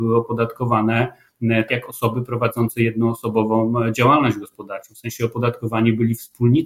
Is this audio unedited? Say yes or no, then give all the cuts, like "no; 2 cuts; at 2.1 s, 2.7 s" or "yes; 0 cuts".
no; 1 cut; at 1.7 s